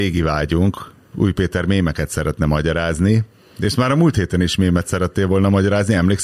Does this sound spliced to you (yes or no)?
no